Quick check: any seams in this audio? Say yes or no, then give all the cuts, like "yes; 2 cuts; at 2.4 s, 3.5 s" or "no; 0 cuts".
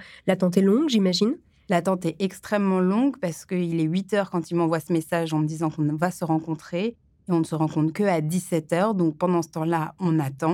no; 0 cuts